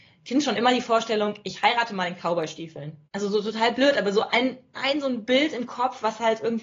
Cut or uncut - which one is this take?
cut